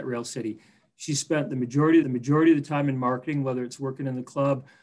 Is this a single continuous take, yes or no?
no